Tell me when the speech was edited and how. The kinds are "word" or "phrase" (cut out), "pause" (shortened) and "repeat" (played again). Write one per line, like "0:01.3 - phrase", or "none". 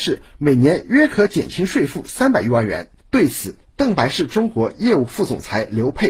0:03.0 - pause

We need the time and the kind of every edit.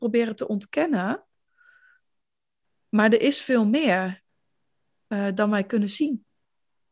none

